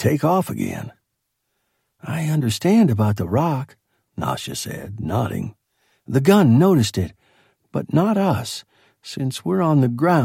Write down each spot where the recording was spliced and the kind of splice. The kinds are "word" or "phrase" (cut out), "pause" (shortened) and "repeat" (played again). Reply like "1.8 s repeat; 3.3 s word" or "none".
none